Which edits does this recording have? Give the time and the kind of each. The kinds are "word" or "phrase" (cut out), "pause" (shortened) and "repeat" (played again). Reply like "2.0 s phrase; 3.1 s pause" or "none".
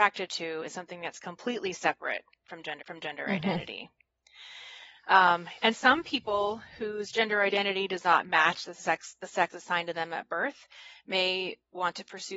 2.8 s repeat; 5.7 s word; 9.5 s word